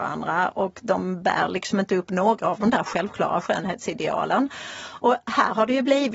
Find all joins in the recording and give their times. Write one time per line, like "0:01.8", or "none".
none